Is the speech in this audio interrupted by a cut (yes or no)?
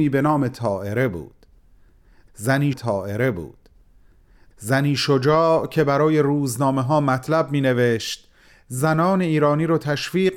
yes